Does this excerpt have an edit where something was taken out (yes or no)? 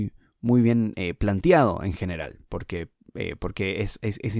no